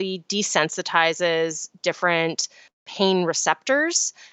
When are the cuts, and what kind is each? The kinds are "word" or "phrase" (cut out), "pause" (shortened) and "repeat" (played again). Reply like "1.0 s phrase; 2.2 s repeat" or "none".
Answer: 2.7 s word